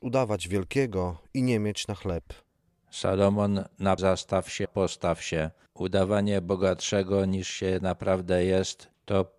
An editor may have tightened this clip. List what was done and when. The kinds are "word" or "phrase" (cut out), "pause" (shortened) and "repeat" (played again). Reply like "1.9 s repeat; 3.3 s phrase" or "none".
4.0 s phrase; 4.7 s word